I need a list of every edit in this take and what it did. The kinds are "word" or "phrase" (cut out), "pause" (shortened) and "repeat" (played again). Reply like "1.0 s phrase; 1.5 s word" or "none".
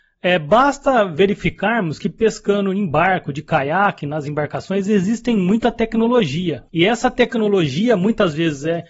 6.7 s pause